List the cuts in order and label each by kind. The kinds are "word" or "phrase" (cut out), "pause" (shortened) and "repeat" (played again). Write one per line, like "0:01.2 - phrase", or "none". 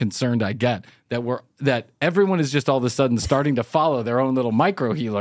none